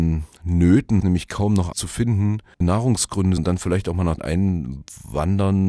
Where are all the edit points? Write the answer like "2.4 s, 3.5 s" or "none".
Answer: 1.0 s, 1.7 s, 2.6 s, 3.4 s, 4.2 s